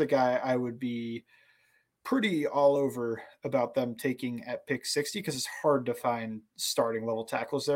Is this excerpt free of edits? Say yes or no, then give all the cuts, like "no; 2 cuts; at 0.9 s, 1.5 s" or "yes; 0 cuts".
yes; 0 cuts